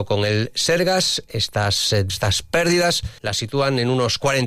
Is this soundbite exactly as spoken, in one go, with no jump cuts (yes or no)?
no